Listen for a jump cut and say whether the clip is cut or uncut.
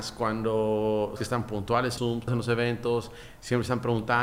cut